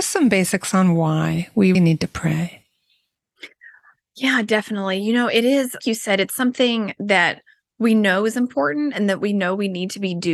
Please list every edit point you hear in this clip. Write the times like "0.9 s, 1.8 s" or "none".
1.7 s, 5.8 s